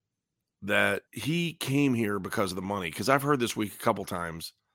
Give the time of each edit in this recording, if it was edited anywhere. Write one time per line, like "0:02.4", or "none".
0:01.1